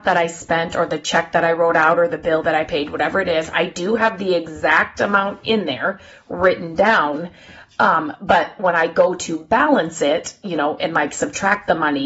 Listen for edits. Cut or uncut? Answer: uncut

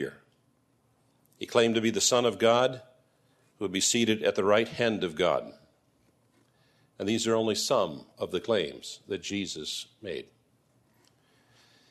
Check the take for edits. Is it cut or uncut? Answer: uncut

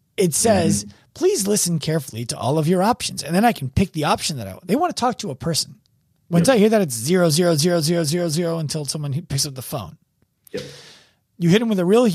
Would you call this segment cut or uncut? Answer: uncut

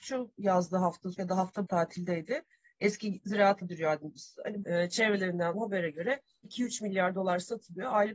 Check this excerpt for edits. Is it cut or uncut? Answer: cut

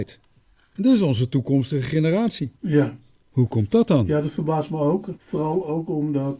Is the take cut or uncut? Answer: cut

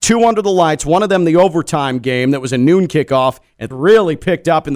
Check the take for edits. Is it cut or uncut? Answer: cut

